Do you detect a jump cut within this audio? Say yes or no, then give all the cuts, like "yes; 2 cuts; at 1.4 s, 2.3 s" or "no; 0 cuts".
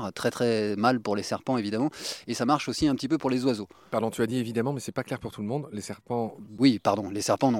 no; 0 cuts